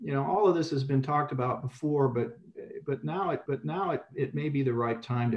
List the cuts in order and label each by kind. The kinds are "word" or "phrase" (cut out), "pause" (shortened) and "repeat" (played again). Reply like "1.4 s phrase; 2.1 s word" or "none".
3.5 s repeat

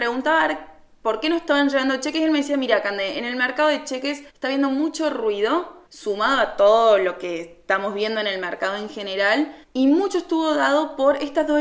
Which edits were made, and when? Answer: 4.3 s pause; 5.9 s pause; 9.6 s pause

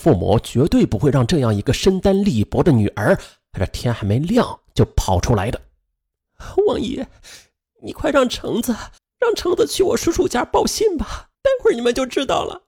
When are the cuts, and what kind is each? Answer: 9.0 s pause; 11.3 s pause

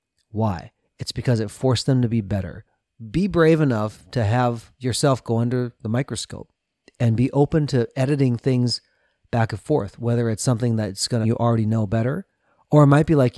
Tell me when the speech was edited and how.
11.2 s phrase

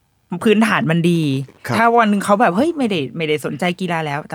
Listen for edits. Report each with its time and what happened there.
none

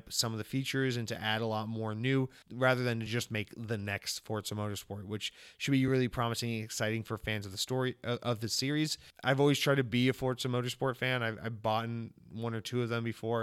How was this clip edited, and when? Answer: none

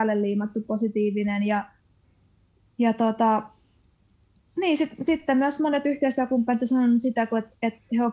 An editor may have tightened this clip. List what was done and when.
none

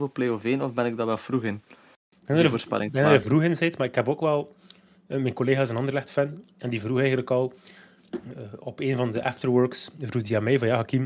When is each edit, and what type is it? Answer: none

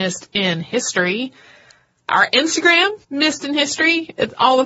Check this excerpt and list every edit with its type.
3.0 s pause

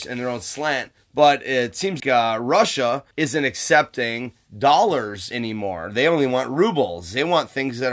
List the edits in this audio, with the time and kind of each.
2.0 s word; 3.1 s pause

